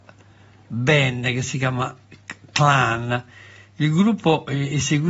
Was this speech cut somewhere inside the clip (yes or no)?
no